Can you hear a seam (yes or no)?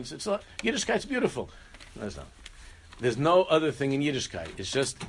no